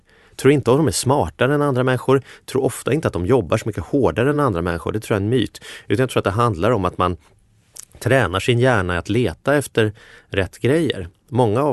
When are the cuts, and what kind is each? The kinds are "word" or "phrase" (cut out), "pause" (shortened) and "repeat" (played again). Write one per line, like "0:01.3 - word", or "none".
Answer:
none